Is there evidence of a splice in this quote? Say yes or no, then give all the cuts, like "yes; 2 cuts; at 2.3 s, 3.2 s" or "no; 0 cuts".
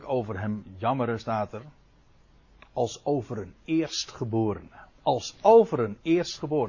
no; 0 cuts